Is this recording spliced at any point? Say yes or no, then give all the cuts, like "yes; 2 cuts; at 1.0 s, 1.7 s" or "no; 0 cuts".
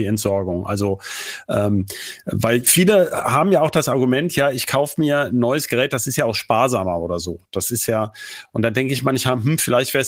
no; 0 cuts